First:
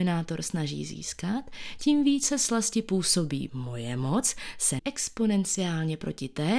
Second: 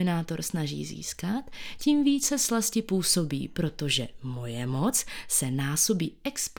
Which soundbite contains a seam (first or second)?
first